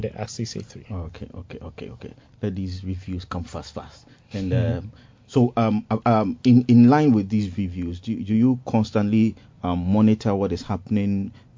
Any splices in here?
no; 0 cuts

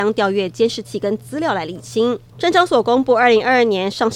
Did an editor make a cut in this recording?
yes; 1 cut; at 2.3 s

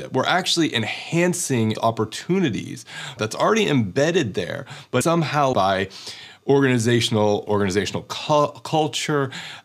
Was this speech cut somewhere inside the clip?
yes; 5 cuts; at 1.7 s, 3.2 s, 5.0 s, 5.5 s, 7.5 s

